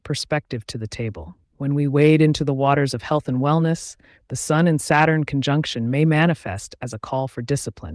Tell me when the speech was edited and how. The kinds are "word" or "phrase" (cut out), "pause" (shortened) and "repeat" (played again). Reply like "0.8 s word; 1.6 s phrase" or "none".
1.4 s pause